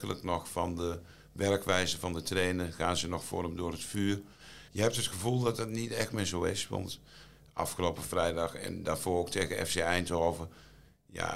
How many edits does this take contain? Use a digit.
1